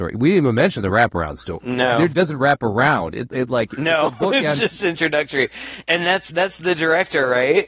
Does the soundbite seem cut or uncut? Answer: uncut